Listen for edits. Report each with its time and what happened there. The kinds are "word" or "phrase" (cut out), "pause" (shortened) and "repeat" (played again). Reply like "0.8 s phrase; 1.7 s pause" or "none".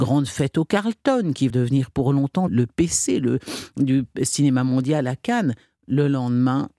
1.5 s word; 2.5 s word